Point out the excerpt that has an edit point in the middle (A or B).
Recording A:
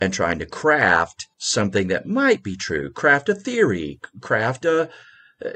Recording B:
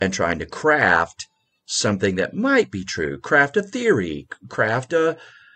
A